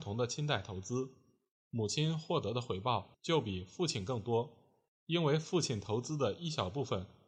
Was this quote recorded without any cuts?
yes; 0 cuts

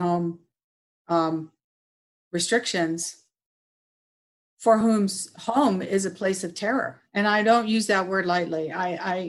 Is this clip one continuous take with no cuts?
yes; 0 cuts

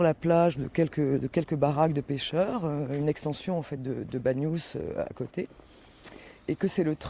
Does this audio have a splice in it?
no; 0 cuts

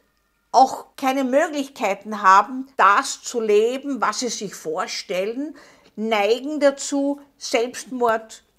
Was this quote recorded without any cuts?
no; 2 cuts; at 0.9 s, 2.7 s

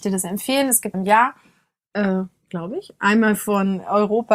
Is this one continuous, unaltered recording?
no; 1 cut; at 0.9 s

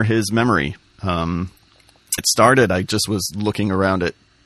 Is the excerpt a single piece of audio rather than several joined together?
no; 1 cut; at 2.2 s

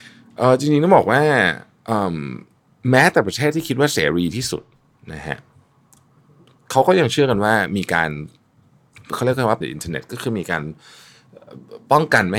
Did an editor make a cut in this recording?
yes; 1 cut; at 9.6 s

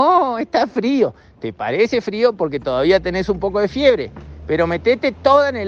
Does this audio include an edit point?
no; 0 cuts

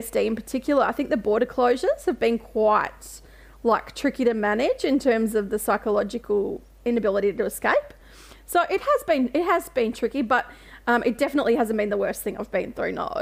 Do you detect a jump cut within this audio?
no; 0 cuts

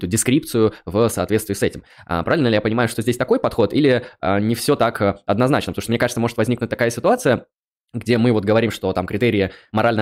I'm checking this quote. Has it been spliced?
no; 0 cuts

